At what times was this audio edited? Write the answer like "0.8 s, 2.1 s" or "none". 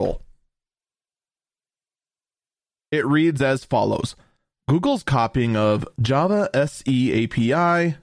none